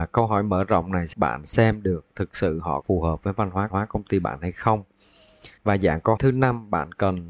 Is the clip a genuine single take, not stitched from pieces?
no; 5 cuts; at 1.1 s, 2.8 s, 3.7 s, 5.6 s, 6.2 s

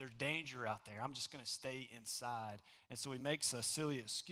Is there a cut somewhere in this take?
no; 0 cuts

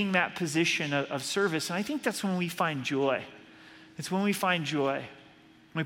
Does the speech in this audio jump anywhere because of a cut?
no; 0 cuts

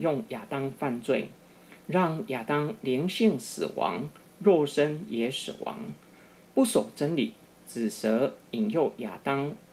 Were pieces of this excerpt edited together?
no; 0 cuts

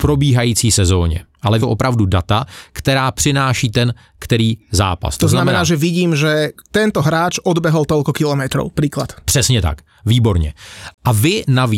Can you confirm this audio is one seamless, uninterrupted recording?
no; 1 cut; at 1.6 s

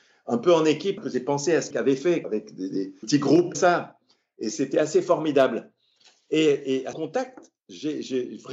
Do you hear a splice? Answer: yes; 7 cuts; at 1.0 s, 1.7 s, 2.2 s, 3.0 s, 3.5 s, 4.5 s, 6.9 s

